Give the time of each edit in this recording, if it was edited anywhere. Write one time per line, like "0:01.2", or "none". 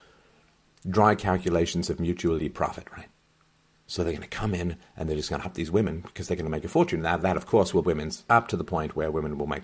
0:02.4
0:05.4
0:07.8
0:08.3